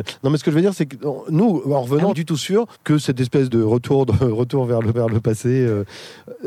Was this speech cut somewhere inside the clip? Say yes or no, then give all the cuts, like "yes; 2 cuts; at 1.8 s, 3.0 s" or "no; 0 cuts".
yes; 4 cuts; at 2.1 s, 2.7 s, 3.5 s, 4.9 s